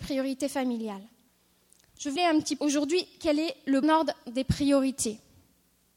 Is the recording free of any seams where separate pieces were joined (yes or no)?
no